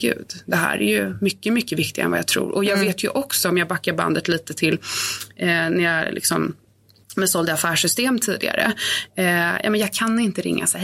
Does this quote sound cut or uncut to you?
uncut